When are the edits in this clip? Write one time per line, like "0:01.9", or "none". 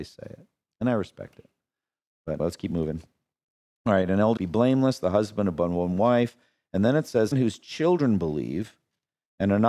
0:02.4
0:04.4
0:07.3